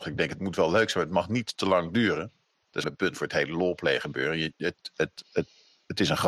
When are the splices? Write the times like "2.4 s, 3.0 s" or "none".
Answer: 2.8 s